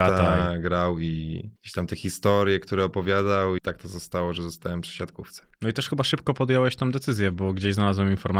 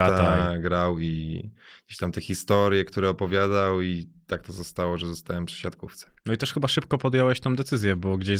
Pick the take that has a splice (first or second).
first